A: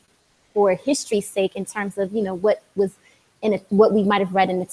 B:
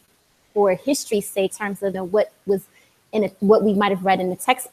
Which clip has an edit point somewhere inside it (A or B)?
B